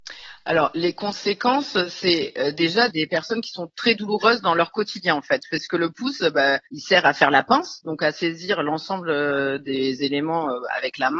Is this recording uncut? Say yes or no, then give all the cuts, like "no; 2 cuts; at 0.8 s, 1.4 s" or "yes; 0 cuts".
no; 2 cuts; at 2.9 s, 6.7 s